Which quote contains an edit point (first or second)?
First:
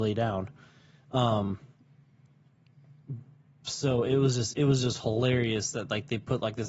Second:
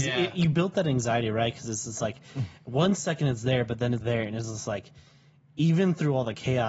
second